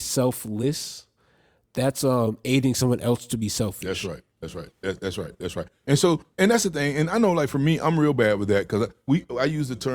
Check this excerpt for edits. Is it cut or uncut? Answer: uncut